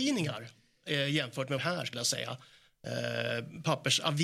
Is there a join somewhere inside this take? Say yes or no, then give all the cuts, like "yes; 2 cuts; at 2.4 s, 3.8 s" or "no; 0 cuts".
yes; 2 cuts; at 1.6 s, 1.9 s